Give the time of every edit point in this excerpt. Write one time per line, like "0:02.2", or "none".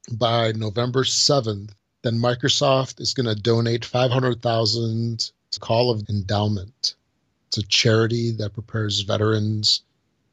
0:01.8
0:05.6
0:06.0